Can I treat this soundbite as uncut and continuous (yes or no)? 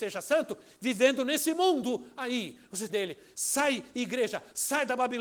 no